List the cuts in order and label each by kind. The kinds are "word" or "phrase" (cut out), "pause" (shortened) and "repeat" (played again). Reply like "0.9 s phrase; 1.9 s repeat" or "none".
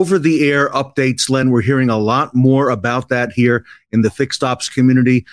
none

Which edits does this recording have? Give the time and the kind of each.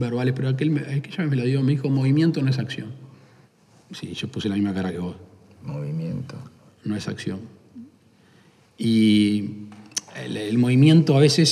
3.4 s pause

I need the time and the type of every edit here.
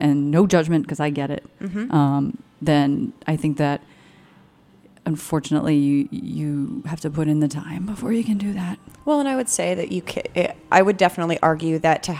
none

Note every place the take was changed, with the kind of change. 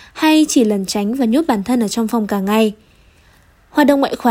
none

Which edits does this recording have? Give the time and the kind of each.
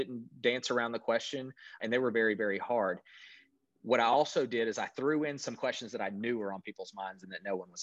none

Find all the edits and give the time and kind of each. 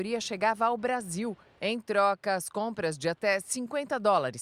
none

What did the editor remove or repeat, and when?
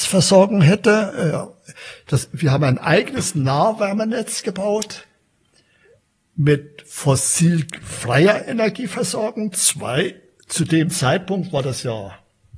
none

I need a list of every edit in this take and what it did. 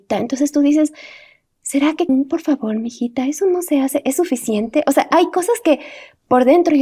2.1 s word

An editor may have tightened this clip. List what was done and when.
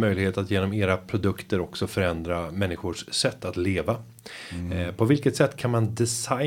none

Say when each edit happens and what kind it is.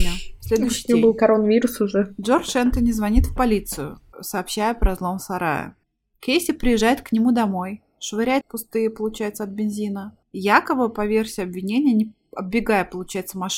5.8 s pause; 8.4 s phrase; 10.2 s pause

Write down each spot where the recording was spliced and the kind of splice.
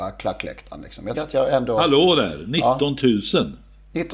1.1 s word

